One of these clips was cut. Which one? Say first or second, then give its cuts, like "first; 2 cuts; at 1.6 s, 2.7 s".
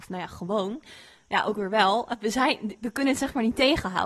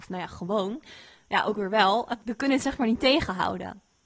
second; 1 cut; at 2.2 s